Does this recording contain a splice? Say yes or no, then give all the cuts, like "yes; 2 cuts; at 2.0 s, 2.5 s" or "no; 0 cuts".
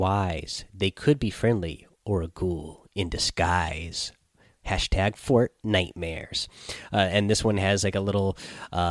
no; 0 cuts